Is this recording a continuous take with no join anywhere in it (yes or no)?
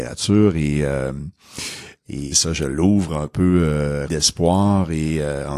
no